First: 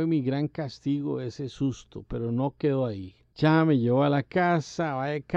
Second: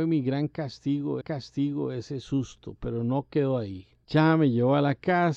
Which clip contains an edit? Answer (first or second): second